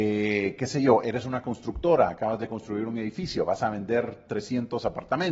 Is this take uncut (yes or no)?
yes